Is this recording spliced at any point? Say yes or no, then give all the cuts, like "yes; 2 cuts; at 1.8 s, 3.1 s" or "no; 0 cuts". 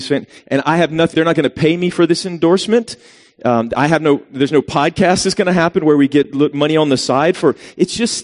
yes; 1 cut; at 1.1 s